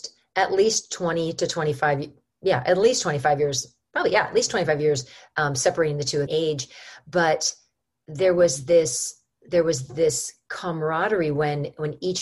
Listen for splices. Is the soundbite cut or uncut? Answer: cut